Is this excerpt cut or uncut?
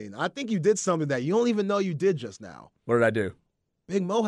uncut